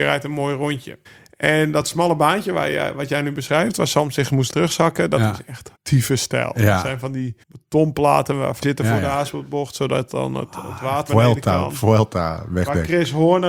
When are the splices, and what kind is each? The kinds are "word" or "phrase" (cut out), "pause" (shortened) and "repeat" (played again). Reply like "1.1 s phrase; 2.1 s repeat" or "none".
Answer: 1.0 s pause; 4.5 s word; 5.7 s pause; 7.4 s pause; 8.6 s phrase; 11.1 s word